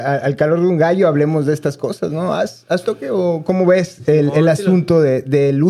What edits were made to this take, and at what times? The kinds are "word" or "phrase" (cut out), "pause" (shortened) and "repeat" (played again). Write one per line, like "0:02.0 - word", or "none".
0:02.8 - phrase